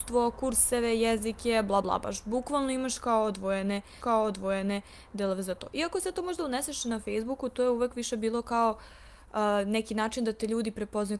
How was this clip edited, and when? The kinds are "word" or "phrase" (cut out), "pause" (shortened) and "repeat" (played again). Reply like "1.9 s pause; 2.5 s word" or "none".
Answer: 1.8 s word; 4.0 s repeat